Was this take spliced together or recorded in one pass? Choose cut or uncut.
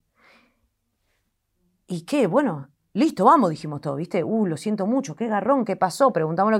uncut